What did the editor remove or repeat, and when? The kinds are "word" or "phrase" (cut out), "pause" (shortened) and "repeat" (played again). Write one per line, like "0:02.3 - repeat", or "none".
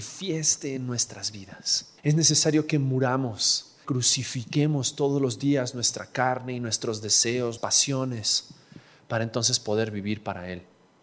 0:02.0 - pause
0:03.8 - phrase
0:07.6 - word